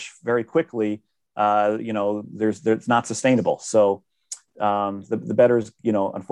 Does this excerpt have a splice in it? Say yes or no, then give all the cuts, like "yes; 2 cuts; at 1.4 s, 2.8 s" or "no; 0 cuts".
no; 0 cuts